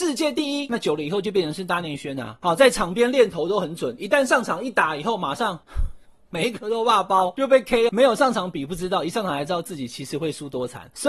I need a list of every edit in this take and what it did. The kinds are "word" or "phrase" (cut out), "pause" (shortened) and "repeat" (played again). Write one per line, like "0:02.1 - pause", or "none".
0:07.9 - phrase